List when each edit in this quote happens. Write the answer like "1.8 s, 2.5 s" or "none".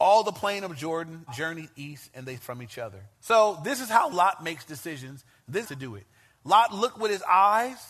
1.3 s, 2.4 s, 3.1 s, 5.6 s